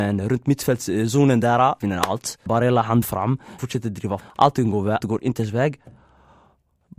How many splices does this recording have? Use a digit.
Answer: 6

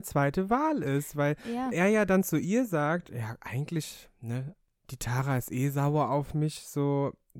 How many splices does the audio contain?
0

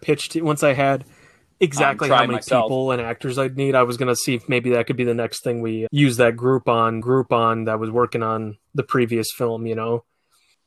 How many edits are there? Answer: 3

